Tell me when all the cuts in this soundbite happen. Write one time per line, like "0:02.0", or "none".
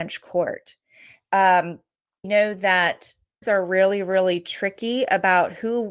0:02.2
0:03.4